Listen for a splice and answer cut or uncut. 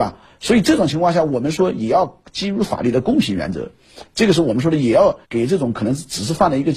cut